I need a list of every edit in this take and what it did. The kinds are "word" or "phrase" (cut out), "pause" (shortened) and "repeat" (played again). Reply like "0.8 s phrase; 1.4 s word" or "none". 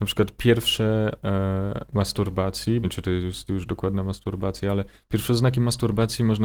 1.2 s word; 2.8 s word